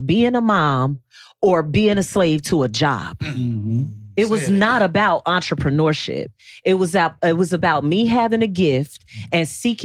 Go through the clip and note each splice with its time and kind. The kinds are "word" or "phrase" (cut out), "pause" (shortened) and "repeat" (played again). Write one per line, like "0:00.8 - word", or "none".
none